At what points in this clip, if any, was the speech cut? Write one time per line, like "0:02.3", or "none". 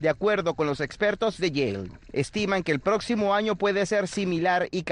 none